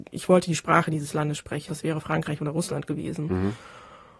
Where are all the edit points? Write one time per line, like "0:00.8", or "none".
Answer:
0:01.7